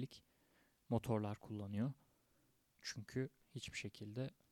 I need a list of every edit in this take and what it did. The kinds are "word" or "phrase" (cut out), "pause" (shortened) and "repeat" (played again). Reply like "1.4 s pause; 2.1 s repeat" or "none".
3.4 s pause